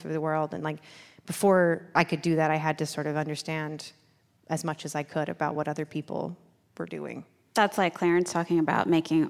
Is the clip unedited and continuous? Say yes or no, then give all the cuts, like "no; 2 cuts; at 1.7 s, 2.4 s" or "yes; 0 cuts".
yes; 0 cuts